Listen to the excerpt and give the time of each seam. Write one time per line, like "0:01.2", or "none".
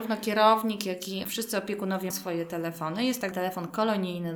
0:01.2
0:02.1
0:03.3